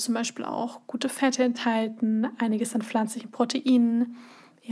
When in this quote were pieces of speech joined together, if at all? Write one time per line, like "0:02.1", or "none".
none